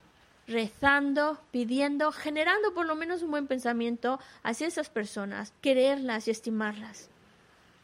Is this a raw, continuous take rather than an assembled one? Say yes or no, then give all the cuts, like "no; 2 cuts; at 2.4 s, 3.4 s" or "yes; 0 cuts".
no; 1 cut; at 5.6 s